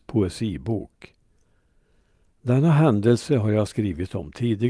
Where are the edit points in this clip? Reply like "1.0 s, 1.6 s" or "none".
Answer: none